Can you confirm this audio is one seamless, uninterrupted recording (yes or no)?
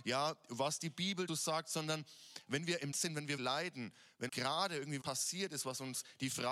no